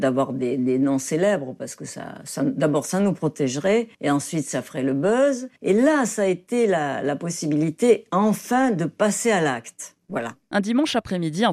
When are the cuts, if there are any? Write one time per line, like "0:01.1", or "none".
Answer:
0:03.9
0:05.6